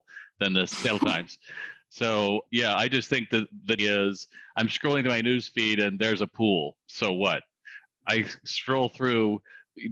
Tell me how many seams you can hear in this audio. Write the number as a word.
two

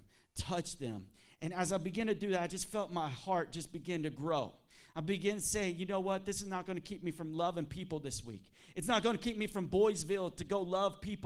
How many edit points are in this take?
zero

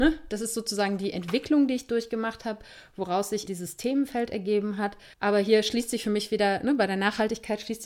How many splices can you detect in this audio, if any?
two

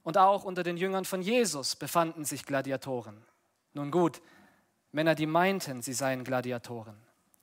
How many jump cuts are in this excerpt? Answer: zero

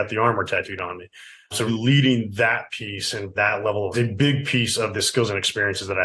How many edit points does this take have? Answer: three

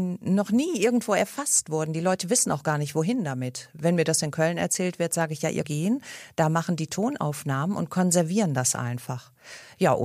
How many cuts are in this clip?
one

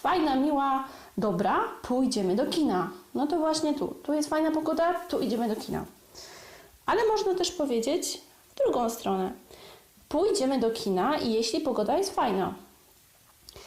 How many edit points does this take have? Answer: zero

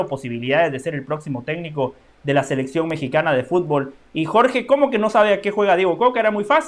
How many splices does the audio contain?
zero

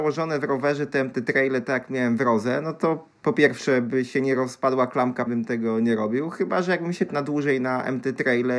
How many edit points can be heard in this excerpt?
three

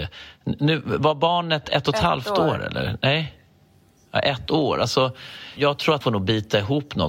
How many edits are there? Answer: two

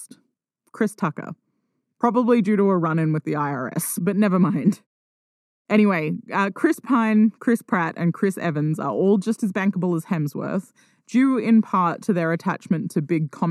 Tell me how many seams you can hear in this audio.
zero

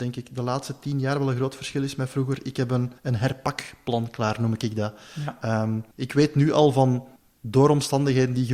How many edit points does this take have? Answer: three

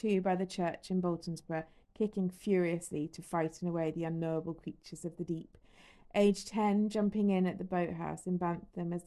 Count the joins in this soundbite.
zero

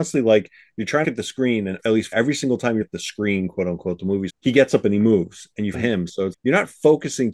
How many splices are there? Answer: seven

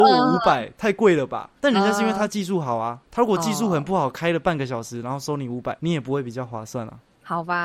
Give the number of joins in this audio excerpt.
one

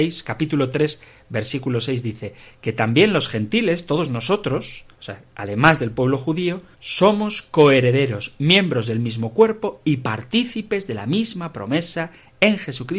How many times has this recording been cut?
two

